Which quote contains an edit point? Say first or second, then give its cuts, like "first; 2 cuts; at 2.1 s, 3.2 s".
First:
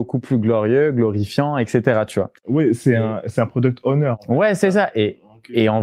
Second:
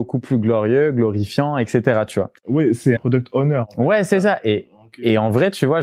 second; 1 cut; at 3.0 s